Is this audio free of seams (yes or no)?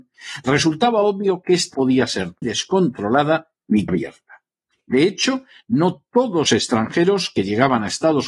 no